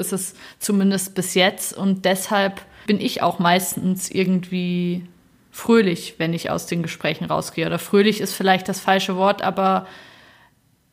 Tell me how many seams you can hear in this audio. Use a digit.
1